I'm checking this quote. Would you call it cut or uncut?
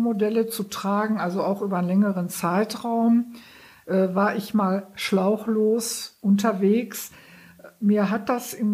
uncut